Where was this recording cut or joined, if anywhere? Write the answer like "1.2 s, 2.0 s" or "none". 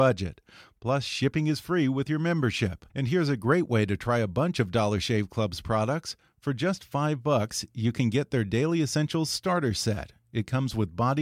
2.9 s